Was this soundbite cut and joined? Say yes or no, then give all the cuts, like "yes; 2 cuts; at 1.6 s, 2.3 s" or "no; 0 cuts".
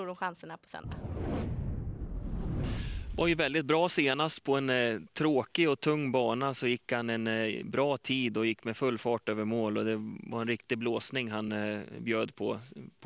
no; 0 cuts